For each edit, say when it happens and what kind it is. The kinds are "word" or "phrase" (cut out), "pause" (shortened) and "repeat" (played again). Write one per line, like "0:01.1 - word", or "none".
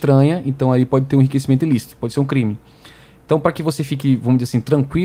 none

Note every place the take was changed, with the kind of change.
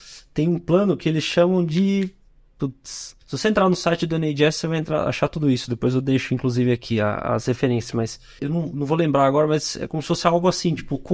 0:03.2 - pause

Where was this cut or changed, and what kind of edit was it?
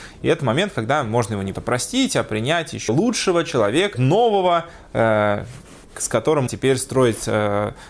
0:01.5 - word
0:02.9 - word
0:03.9 - phrase
0:06.5 - word

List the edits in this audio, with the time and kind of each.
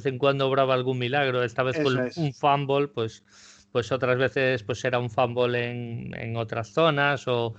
none

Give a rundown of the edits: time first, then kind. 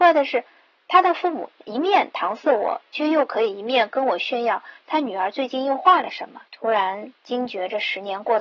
0:06.5 - pause
0:07.2 - pause

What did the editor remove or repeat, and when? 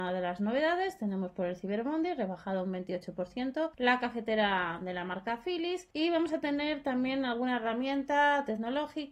0:03.7 - pause
0:05.9 - pause

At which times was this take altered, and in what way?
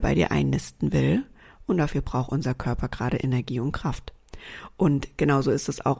none

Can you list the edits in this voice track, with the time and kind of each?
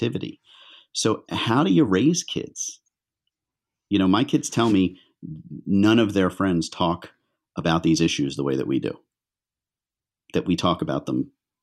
none

